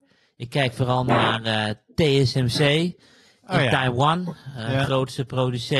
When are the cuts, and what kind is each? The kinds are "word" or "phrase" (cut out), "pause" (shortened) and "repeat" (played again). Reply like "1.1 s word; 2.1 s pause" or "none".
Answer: none